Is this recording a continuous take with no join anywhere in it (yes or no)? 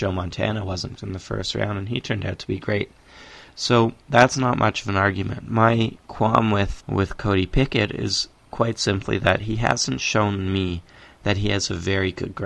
no